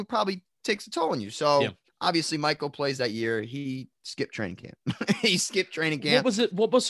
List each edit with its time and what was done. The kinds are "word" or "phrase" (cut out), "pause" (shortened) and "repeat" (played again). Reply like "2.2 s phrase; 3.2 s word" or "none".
1.9 s pause